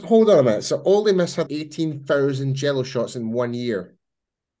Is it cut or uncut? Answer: cut